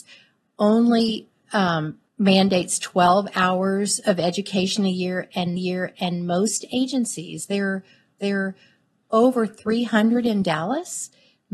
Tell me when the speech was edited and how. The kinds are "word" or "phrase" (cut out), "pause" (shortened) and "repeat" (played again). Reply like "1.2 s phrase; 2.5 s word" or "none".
2.1 s pause; 5.6 s repeat; 8.2 s repeat